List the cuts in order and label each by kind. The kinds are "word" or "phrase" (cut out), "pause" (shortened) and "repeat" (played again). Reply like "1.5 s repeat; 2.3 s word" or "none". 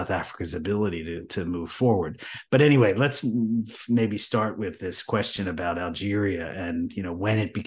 none

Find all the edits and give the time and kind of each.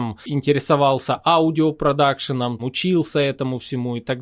2.6 s word

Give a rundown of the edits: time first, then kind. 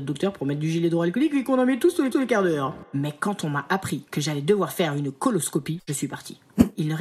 2.1 s repeat; 4.1 s pause; 5.8 s word

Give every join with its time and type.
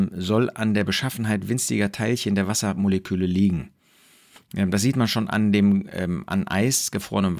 none

